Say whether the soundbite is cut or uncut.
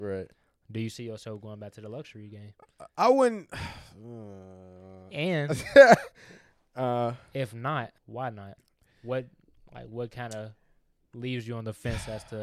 cut